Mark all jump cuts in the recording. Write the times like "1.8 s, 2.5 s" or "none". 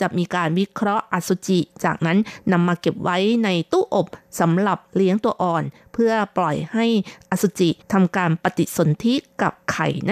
7.8 s